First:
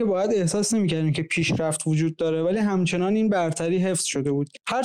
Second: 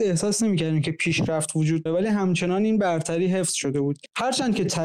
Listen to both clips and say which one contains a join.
second; 1 cut; at 1.9 s

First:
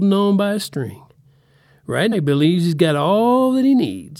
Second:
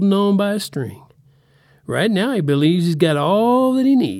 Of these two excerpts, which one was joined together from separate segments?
first; 1 cut; at 2.1 s

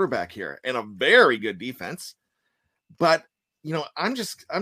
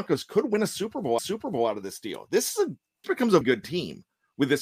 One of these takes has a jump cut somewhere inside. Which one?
second; 3 cuts; at 1.2 s, 3.0 s, 3.4 s

